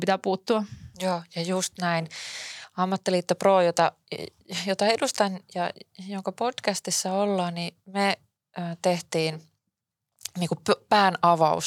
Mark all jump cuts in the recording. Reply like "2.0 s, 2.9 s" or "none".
none